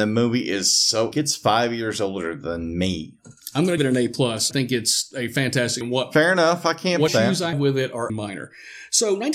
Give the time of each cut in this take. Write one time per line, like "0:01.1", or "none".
0:01.1
0:03.8
0:04.5
0:05.8
0:07.1
0:07.5
0:08.1